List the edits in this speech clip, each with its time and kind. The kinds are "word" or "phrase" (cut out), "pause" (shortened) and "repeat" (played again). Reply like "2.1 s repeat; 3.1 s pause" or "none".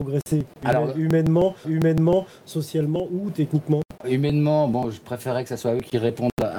1.6 s repeat; 4.0 s word